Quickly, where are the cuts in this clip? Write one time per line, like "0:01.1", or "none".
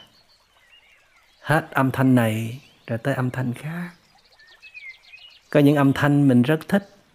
none